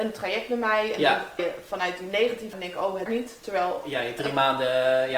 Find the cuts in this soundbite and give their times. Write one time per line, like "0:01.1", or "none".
0:01.4
0:02.5
0:03.1
0:03.8